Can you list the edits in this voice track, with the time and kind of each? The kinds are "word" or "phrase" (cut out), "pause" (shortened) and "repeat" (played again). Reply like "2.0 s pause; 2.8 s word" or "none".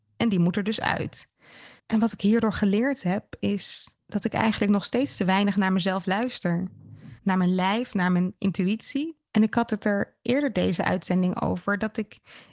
1.8 s pause; 4.0 s pause; 7.2 s pause; 9.3 s pause